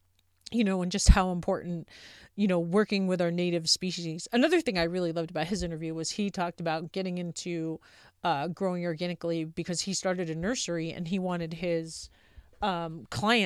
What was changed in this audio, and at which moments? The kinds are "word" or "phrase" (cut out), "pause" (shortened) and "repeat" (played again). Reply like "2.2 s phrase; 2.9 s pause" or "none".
none